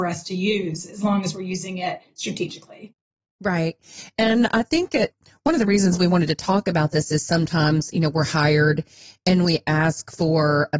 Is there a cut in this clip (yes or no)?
no